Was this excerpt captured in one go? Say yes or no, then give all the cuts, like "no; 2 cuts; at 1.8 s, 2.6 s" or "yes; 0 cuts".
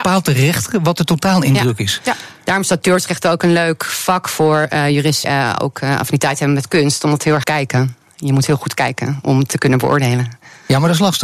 no; 2 cuts; at 5.2 s, 7.4 s